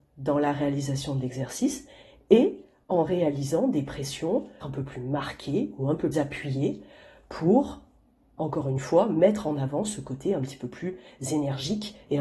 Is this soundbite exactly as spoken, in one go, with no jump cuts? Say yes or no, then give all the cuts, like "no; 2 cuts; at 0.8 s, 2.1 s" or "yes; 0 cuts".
no; 2 cuts; at 4.6 s, 6.1 s